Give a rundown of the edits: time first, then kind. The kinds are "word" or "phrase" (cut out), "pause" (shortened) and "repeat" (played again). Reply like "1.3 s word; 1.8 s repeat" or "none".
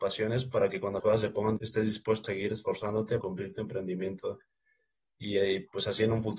1.0 s word; 1.6 s word; 2.2 s word; 3.2 s word